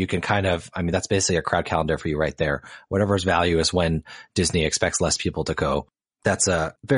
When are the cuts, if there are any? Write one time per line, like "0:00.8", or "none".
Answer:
none